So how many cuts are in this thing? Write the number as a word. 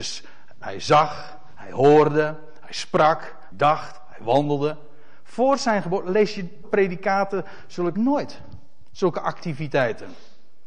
three